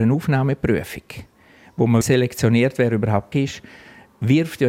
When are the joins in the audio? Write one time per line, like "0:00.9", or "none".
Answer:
0:02.0
0:03.3